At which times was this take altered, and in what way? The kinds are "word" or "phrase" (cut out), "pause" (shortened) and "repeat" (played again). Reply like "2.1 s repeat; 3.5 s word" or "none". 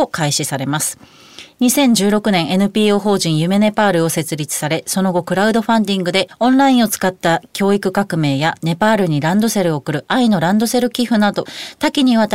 none